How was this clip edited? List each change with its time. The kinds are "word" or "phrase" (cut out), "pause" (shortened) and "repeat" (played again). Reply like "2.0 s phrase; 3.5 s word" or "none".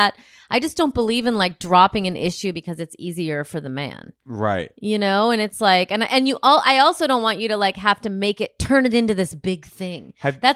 none